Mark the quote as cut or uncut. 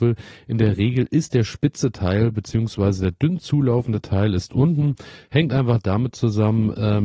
uncut